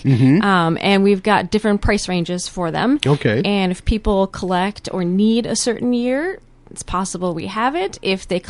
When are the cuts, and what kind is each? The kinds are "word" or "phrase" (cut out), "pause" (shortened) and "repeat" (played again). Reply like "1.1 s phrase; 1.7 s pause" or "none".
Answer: none